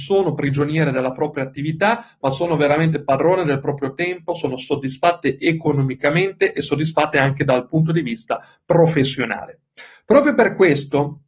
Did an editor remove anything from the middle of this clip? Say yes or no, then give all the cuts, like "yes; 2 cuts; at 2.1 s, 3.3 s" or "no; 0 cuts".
no; 0 cuts